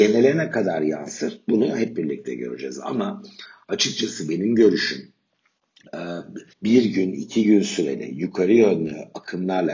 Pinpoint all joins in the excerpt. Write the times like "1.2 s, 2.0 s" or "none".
6.5 s